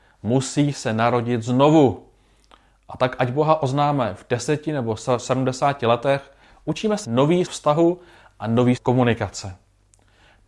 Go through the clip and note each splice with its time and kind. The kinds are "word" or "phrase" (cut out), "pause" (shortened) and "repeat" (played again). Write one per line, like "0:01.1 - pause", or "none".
0:07.0 - word
0:07.5 - word
0:08.8 - word

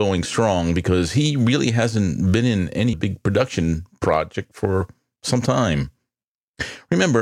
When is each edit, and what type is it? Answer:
0:02.9 - word

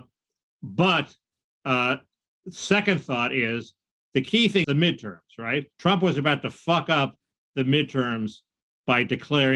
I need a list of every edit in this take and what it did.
0:04.6 - phrase
0:05.7 - pause

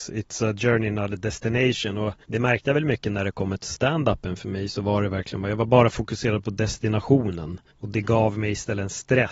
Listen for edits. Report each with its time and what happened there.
0:02.2 - pause
0:03.6 - word
0:07.7 - pause

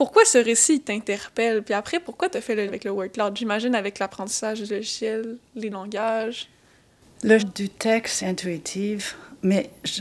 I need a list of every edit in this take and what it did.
0:02.7 - word
0:05.7 - word
0:07.4 - word
0:08.2 - word

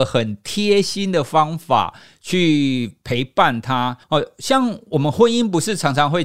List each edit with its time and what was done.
0:04.0 - pause

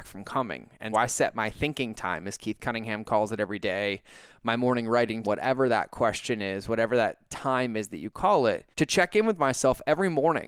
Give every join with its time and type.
0:00.9 - word
0:05.2 - word
0:08.7 - pause

